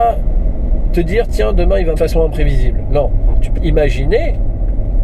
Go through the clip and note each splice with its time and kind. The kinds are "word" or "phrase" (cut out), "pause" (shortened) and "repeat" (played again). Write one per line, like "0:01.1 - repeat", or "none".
0:02.0 - phrase
0:03.6 - word